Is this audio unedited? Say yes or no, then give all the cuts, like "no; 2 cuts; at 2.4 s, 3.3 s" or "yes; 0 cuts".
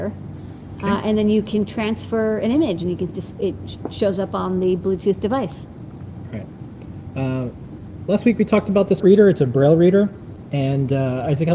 no; 2 cuts; at 3.1 s, 9.0 s